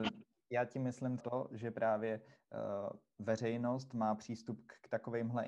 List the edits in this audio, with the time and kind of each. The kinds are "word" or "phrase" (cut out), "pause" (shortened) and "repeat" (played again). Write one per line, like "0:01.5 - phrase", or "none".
0:01.2 - word